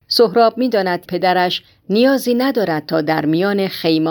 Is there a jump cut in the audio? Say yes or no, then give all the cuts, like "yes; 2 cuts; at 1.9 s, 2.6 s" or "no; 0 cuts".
yes; 1 cut; at 1.1 s